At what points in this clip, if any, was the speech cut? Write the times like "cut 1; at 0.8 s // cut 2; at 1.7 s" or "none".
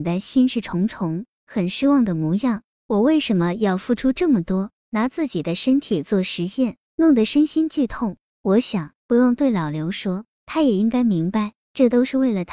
cut 1; at 9.0 s